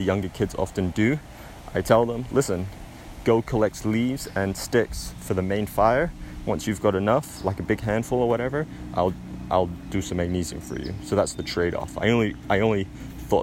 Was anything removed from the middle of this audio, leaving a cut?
no; 0 cuts

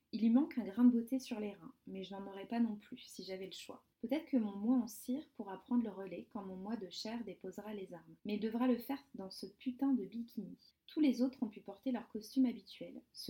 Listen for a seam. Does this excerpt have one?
yes; 3 cuts; at 3.9 s, 8.2 s, 10.7 s

